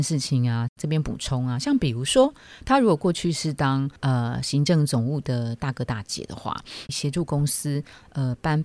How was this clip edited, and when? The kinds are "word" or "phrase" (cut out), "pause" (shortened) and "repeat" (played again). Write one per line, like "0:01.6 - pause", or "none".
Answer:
0:04.0 - pause
0:06.9 - word